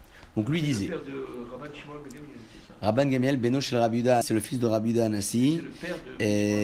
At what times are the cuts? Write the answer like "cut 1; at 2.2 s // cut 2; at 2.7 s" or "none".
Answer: cut 1; at 4.2 s